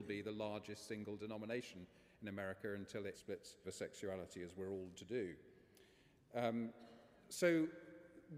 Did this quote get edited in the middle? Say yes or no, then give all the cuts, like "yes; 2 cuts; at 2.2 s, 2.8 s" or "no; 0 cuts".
yes; 3 cuts; at 3.1 s, 3.6 s, 4.9 s